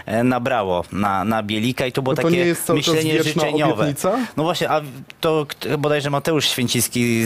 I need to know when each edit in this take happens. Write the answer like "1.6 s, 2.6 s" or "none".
none